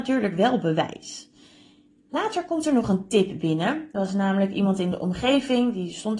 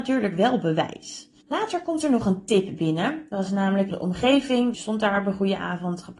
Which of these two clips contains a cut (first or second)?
second